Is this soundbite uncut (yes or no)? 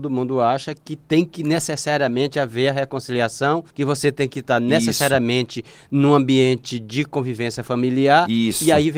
no